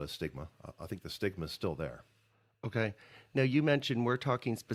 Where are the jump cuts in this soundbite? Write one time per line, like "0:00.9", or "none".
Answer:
none